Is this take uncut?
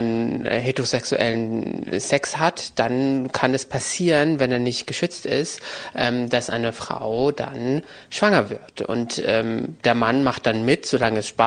yes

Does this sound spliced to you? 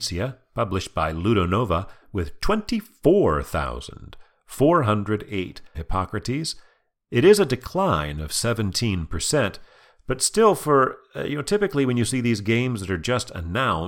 yes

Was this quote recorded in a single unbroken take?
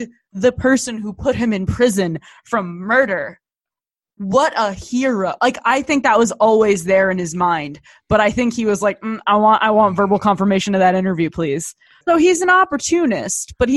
yes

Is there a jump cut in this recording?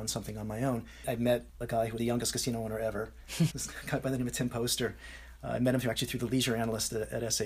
yes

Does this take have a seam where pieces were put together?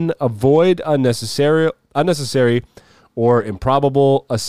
no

